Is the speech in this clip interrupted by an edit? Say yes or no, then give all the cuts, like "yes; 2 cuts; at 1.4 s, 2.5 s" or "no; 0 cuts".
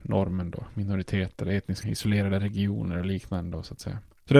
yes; 1 cut; at 1.8 s